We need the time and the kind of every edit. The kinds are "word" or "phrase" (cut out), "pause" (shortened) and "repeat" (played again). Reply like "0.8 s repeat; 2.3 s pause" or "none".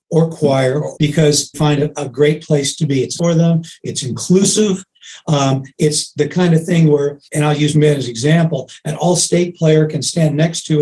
0.9 s word; 1.5 s word; 3.2 s phrase; 7.2 s pause; 7.7 s word